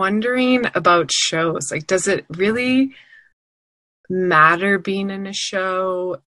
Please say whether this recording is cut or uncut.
uncut